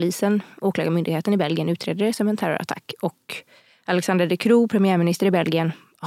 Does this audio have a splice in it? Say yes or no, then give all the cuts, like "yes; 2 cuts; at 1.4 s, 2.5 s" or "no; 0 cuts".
no; 0 cuts